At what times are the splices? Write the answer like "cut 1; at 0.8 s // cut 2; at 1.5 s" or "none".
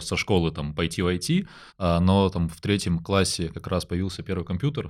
cut 1; at 1.7 s